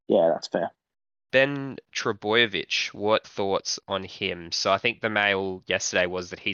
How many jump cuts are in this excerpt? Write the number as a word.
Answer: two